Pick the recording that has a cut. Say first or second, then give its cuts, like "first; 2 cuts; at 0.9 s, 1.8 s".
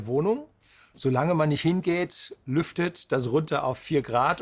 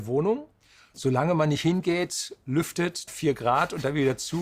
second; 1 cut; at 3.1 s